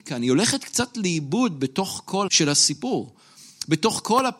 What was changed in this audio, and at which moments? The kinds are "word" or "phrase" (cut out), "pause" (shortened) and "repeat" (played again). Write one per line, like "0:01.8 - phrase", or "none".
0:02.3 - word